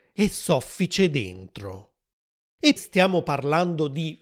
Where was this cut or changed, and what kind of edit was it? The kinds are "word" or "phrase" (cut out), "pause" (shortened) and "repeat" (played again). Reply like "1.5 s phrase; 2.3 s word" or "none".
2.8 s word